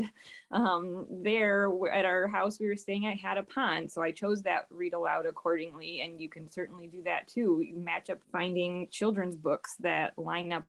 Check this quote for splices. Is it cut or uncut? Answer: cut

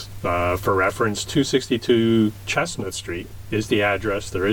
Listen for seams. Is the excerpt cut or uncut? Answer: uncut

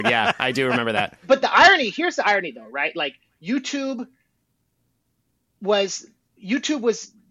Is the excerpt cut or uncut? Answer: uncut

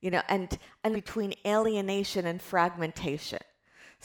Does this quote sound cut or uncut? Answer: cut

